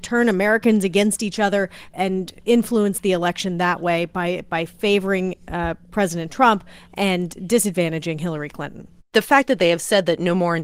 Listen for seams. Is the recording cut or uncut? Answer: uncut